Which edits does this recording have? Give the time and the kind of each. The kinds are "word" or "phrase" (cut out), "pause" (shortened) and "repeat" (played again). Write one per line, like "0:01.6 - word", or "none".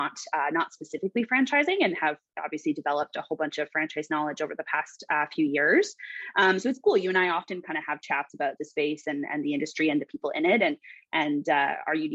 0:08.6 - word

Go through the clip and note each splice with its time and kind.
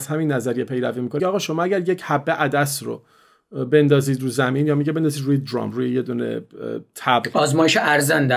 0:01.2 - word

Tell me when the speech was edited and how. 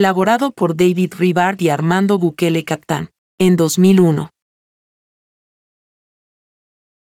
none

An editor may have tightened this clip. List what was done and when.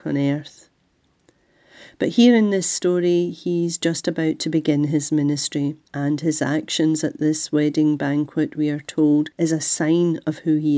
0:05.8 - pause
0:09.3 - pause

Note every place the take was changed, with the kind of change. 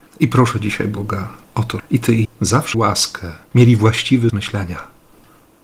0:01.4 - pause
0:01.8 - word
0:02.2 - word
0:02.7 - word
0:03.5 - pause
0:04.3 - word

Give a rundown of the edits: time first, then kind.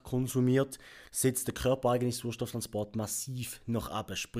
0:01.1 - pause

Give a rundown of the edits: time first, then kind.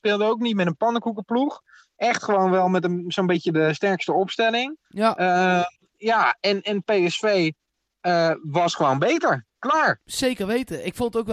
0:04.8 - pause

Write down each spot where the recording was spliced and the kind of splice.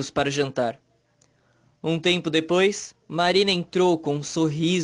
0:03.0 - pause

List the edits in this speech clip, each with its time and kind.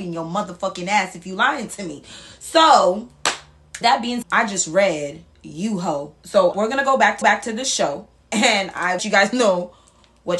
0:03.8 - word
0:04.2 - word
0:06.5 - word
0:07.2 - repeat
0:09.0 - phrase

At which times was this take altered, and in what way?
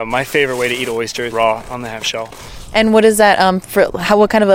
0:01.3 - word

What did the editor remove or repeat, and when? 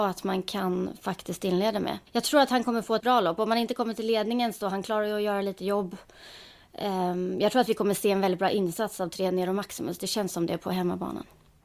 0:02.1 - pause
0:03.0 - word

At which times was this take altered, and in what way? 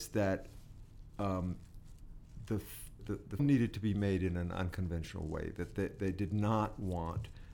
0:03.0 - word
0:03.4 - word

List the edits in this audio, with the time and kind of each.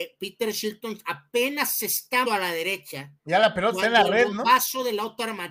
0:02.2 - word

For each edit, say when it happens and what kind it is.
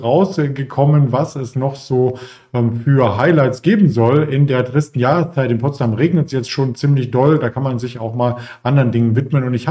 none

